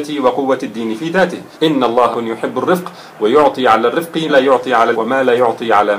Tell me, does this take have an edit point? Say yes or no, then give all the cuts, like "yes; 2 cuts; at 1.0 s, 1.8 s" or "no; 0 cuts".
yes; 4 cuts; at 1.5 s, 2.1 s, 4.3 s, 4.9 s